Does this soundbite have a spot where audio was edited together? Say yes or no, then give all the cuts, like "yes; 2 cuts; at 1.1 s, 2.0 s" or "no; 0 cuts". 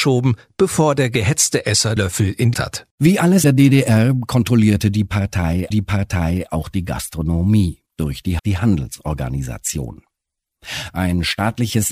yes; 7 cuts; at 2.0 s, 2.5 s, 2.9 s, 3.4 s, 5.7 s, 7.9 s, 8.4 s